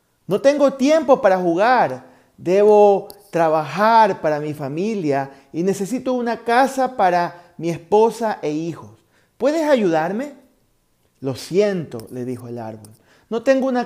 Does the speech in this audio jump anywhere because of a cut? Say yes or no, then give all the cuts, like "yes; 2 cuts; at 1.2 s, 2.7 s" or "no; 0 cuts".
no; 0 cuts